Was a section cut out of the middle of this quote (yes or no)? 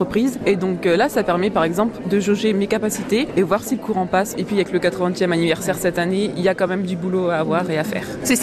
no